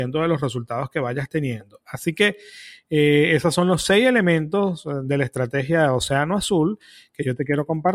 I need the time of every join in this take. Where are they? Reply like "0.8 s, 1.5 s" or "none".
none